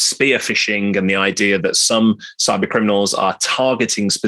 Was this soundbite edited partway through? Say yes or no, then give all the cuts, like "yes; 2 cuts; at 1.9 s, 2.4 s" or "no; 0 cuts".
no; 0 cuts